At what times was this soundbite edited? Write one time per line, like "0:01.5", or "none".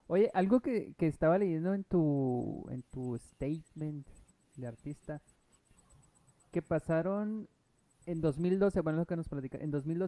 none